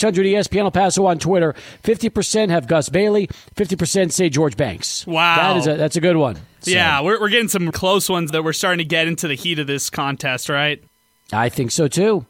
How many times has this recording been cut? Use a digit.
2